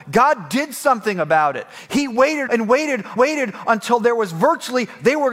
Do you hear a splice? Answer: yes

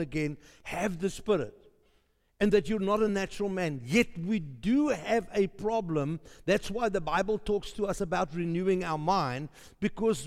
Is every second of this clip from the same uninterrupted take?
yes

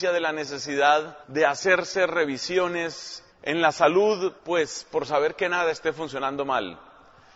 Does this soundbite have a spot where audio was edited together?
yes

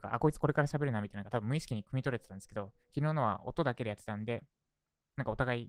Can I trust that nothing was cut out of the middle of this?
yes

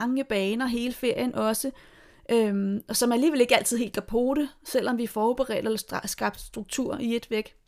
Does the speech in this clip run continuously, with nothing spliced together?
yes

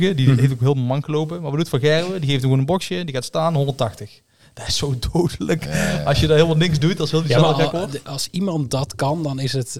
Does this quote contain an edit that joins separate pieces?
no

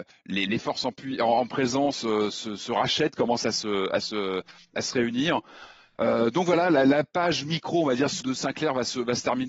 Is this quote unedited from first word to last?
no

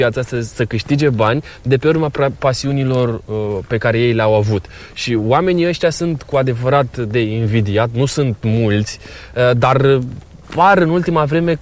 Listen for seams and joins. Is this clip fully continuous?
no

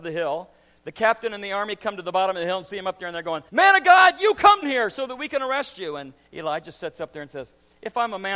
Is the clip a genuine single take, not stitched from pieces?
no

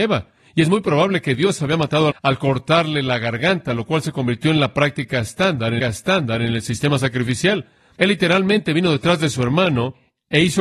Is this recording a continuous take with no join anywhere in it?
no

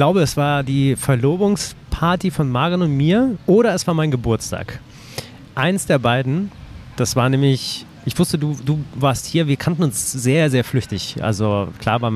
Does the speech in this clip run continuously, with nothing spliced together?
yes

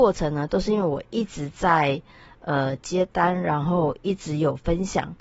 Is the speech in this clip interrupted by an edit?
no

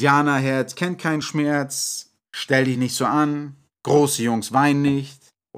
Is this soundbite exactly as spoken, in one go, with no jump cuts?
yes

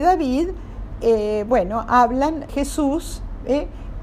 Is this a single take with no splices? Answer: no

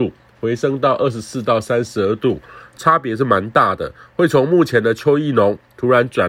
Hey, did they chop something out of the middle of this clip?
no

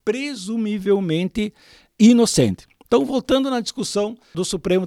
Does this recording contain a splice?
no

